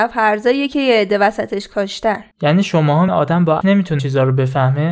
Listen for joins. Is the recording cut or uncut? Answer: cut